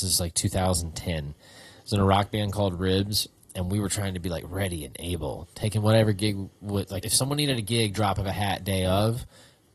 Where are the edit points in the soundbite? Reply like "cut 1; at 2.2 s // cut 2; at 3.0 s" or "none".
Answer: cut 1; at 7.0 s